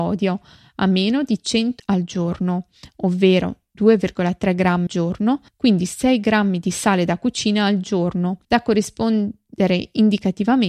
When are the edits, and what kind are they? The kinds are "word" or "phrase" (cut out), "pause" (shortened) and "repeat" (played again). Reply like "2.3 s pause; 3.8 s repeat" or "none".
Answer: 1.8 s word; 4.9 s word; 5.5 s pause; 8.4 s pause

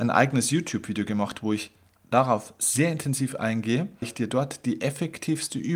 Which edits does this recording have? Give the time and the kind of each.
4.0 s word

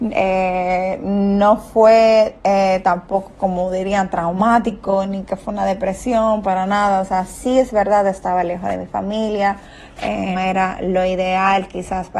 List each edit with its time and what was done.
2.4 s pause; 10.4 s word

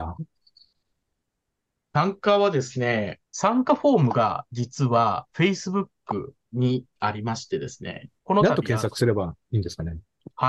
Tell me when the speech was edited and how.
3.2 s pause; 8.2 s pause

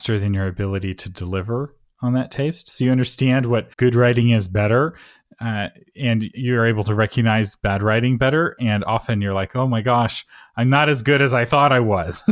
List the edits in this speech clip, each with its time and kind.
3.7 s pause

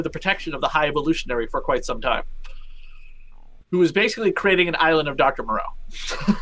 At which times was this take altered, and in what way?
3.6 s pause

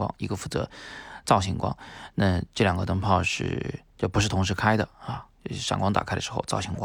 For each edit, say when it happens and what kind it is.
3.9 s pause

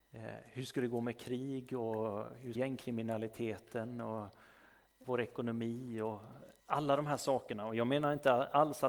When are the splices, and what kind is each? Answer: 2.5 s phrase; 5.0 s word; 6.6 s pause

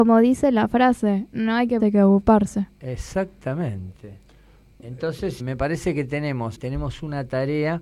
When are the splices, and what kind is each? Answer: 1.8 s word; 5.4 s word; 6.5 s word

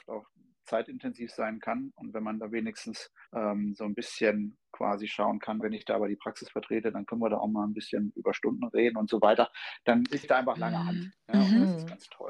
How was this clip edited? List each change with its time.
3.3 s pause; 5.6 s word; 10.2 s word; 11.2 s pause

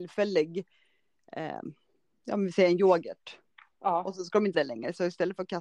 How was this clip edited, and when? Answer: 4.5 s word

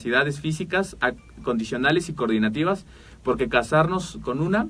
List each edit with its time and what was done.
none

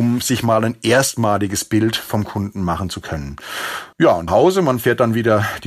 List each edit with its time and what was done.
3.9 s pause; 4.3 s phrase

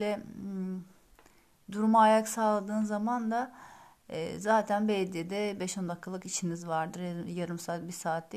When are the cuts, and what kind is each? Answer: none

